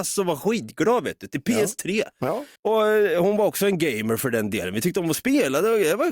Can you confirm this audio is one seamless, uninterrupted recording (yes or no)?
no